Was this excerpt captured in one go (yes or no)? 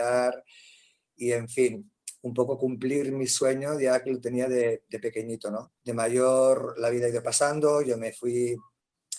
no